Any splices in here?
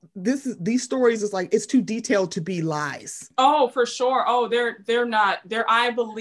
no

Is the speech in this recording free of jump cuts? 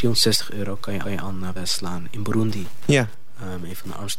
no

